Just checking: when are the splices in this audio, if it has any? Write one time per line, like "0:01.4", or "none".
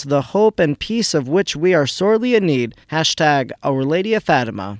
0:02.8